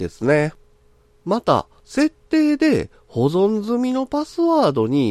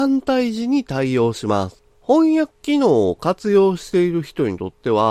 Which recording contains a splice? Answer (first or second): second